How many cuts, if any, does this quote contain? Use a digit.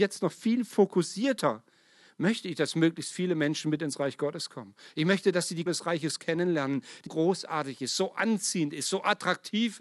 3